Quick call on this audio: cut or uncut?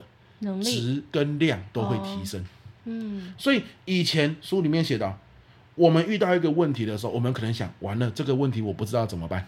cut